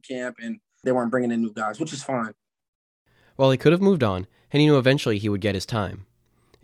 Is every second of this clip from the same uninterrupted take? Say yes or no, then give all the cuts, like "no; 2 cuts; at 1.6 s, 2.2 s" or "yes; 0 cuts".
yes; 0 cuts